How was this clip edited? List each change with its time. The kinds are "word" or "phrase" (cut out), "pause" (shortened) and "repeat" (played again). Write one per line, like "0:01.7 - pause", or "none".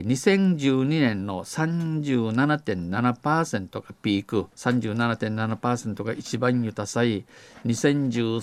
0:04.5 - pause